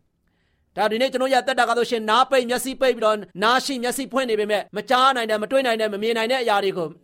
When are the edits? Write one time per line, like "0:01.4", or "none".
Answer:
0:03.3
0:04.7